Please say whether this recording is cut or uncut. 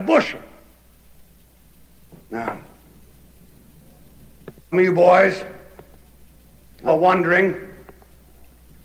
cut